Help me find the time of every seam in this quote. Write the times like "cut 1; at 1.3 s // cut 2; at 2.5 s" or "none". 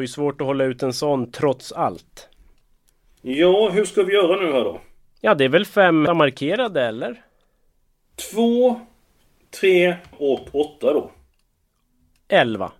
cut 1; at 6.1 s // cut 2; at 10.1 s